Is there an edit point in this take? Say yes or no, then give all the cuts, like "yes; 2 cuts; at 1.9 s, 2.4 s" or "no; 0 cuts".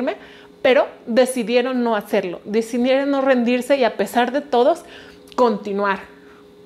no; 0 cuts